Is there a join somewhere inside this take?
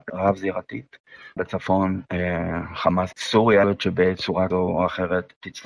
yes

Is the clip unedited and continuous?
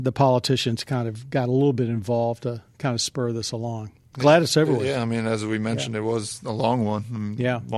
yes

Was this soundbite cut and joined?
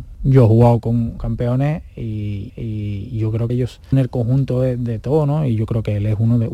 yes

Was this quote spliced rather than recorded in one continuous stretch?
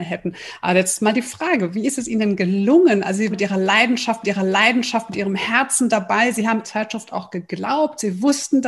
yes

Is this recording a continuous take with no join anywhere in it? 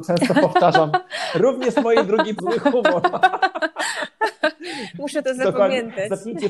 no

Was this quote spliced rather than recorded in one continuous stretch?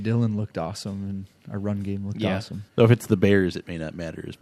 yes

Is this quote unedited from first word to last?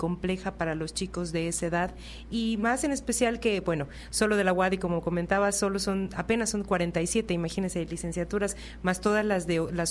yes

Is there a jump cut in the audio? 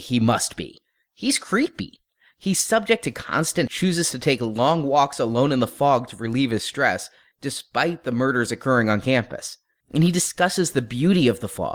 yes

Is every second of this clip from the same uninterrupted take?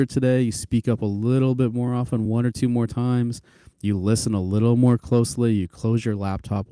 yes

